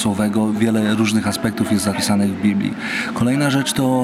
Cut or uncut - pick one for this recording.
uncut